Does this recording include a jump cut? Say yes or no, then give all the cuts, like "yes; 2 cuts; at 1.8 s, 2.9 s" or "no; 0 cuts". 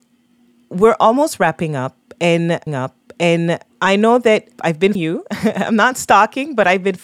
yes; 3 cuts; at 2.7 s, 4.5 s, 5.0 s